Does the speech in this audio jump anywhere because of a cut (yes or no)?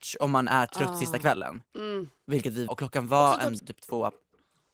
yes